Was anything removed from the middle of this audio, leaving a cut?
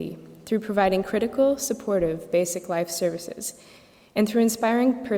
no; 0 cuts

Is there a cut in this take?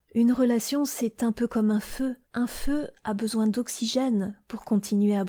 yes; 1 cut; at 2.2 s

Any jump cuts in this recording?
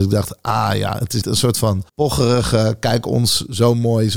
yes; 2 cuts; at 1.2 s, 1.9 s

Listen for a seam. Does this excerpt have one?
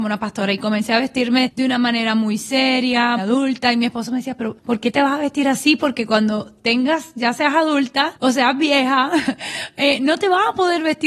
yes; 1 cut; at 3.2 s

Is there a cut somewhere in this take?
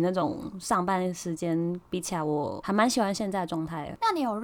no; 0 cuts

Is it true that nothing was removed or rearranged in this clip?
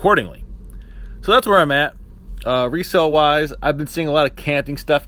yes; 0 cuts

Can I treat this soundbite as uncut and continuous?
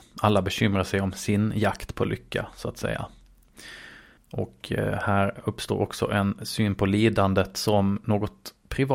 no; 1 cut; at 4.2 s

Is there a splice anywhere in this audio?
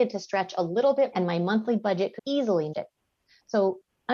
yes; 3 cuts; at 1.1 s, 2.2 s, 2.7 s

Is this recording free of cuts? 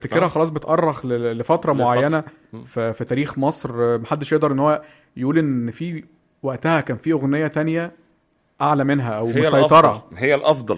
yes; 0 cuts

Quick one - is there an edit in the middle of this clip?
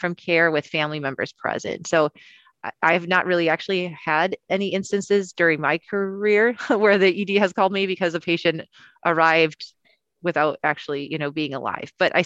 no; 0 cuts

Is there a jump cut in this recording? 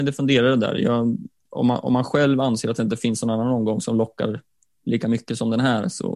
no; 0 cuts

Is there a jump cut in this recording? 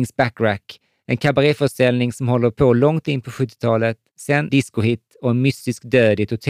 yes; 1 cut; at 4.5 s

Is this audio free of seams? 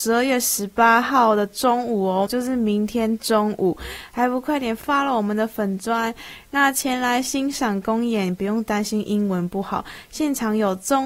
no; 1 cut; at 2.3 s

